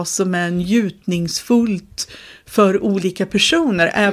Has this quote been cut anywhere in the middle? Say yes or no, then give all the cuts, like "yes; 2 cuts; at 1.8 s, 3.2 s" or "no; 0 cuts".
no; 0 cuts